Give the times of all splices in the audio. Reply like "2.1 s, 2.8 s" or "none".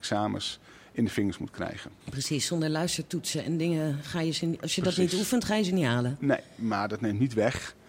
2.0 s